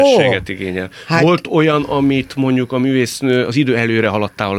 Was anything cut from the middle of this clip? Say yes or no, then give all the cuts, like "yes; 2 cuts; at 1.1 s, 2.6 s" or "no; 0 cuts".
no; 0 cuts